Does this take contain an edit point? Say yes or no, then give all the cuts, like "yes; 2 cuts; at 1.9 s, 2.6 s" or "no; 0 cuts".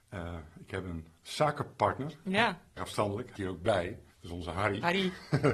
yes; 3 cuts; at 2.8 s, 3.4 s, 4.1 s